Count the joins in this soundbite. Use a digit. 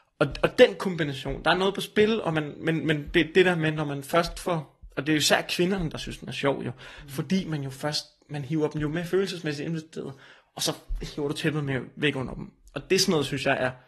0